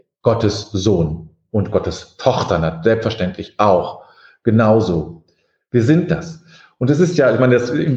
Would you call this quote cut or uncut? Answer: uncut